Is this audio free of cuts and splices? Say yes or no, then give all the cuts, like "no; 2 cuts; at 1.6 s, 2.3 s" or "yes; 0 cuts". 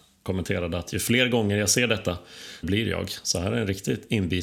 no; 1 cut; at 2.6 s